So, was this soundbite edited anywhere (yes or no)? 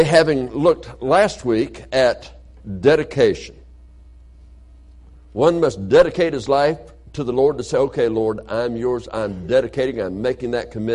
no